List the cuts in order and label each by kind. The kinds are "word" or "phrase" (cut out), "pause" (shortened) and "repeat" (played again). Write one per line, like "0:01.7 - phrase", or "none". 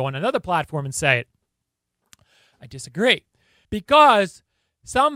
none